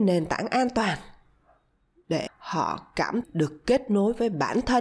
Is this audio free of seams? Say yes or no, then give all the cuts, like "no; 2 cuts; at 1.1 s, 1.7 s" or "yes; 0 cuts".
no; 2 cuts; at 2.3 s, 3.2 s